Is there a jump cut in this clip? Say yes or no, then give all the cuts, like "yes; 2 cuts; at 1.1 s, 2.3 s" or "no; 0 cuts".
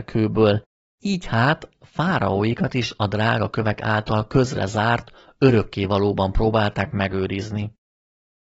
no; 0 cuts